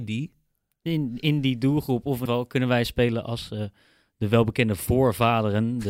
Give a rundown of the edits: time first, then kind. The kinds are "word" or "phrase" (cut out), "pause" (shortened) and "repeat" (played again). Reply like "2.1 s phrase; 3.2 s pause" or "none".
2.3 s word